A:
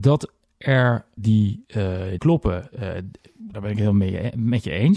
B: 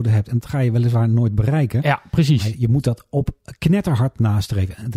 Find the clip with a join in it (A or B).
A